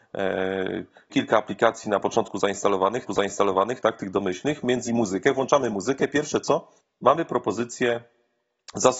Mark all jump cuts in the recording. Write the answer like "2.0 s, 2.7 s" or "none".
1.1 s, 2.0 s, 3.1 s, 4.9 s, 6.8 s